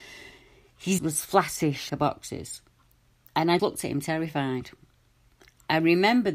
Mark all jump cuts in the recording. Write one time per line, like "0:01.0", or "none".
0:01.0
0:01.9
0:03.6